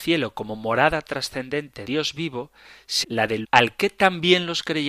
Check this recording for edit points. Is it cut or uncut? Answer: cut